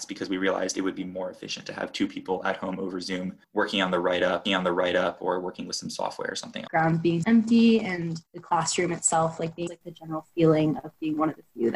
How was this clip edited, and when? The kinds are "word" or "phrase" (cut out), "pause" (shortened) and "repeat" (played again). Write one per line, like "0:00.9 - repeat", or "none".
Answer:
0:03.4 - pause
0:04.5 - repeat
0:06.7 - phrase
0:07.2 - word
0:08.3 - pause
0:09.7 - phrase